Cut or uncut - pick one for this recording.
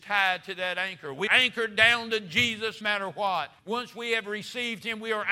cut